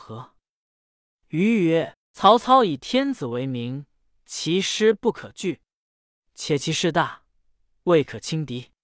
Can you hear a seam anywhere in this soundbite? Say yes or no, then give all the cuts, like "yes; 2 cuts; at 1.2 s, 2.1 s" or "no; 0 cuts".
no; 0 cuts